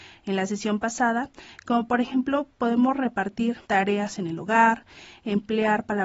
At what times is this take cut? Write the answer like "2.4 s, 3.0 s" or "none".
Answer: 3.6 s